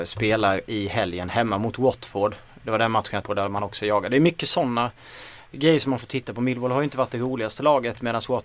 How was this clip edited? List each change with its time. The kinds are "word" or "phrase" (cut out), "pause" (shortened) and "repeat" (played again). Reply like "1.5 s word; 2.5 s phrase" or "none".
3.2 s word